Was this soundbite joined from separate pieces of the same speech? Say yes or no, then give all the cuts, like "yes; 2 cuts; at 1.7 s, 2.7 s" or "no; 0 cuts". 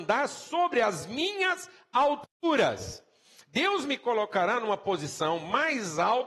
no; 0 cuts